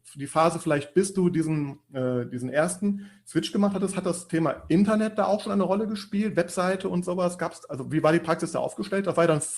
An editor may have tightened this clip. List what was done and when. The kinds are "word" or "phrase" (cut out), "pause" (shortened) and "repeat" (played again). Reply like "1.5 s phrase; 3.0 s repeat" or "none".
none